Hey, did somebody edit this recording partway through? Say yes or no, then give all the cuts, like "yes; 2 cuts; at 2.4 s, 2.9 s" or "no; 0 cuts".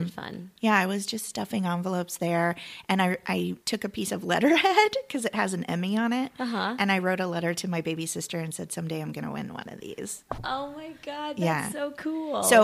yes; 1 cut; at 3.6 s